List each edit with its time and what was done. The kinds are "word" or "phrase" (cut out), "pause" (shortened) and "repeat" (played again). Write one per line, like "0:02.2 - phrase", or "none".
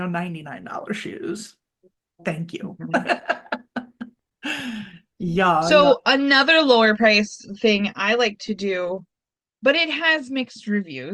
none